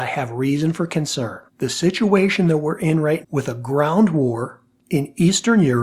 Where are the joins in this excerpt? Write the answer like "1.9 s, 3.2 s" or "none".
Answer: 1.5 s, 3.2 s

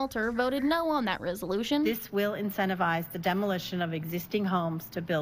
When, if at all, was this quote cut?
none

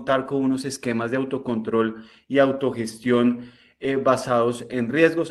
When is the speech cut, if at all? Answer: none

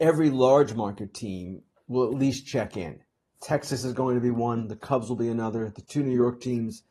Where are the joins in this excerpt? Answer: none

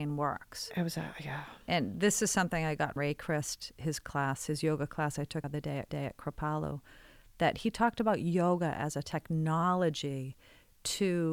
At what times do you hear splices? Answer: 1.6 s, 3.0 s, 5.4 s, 5.9 s

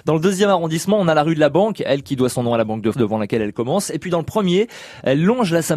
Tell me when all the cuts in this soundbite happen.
2.9 s

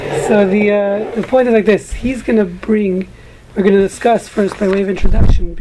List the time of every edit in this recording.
none

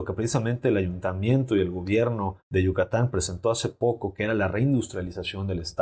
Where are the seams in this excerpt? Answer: 2.4 s

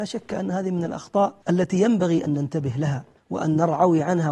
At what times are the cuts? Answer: 1.4 s, 3.2 s

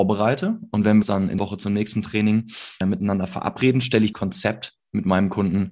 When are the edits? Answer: 1.0 s, 1.4 s, 2.8 s, 4.1 s

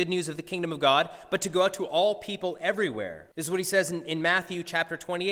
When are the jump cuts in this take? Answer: 3.3 s

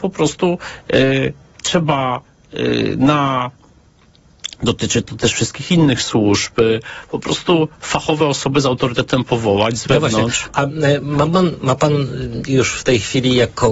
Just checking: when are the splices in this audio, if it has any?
none

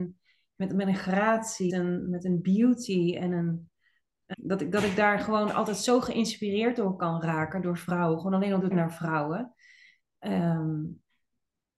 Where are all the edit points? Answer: 1.7 s, 4.3 s, 8.7 s

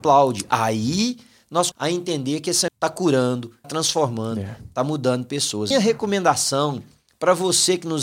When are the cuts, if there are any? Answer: 1.7 s, 2.7 s, 3.6 s, 5.7 s

